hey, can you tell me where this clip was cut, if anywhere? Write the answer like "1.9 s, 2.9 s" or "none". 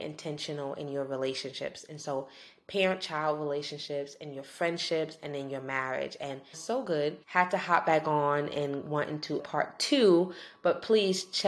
6.5 s, 7.2 s, 9.4 s